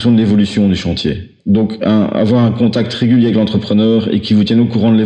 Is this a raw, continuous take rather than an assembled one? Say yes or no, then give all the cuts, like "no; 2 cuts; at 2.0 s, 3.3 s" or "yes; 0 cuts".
no; 1 cut; at 1.4 s